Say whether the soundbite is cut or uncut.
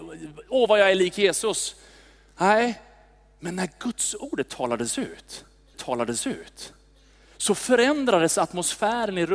cut